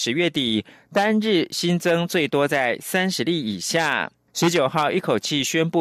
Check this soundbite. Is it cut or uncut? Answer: cut